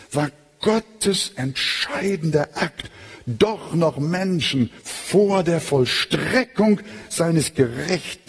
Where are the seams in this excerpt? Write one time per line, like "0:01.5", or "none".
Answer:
0:04.8